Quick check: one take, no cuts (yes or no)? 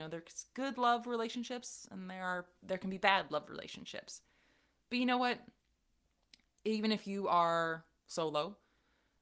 yes